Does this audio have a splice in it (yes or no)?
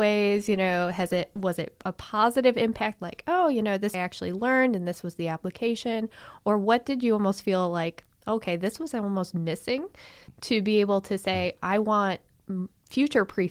yes